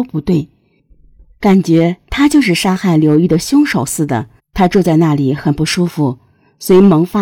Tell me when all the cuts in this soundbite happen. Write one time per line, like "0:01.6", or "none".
0:04.4